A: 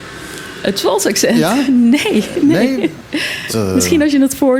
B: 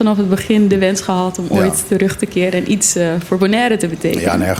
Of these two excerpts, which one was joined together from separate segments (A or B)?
A